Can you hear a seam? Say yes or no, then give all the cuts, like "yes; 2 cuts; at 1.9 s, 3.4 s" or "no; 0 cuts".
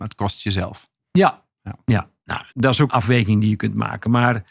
yes; 3 cuts; at 1.0 s, 2.5 s, 2.9 s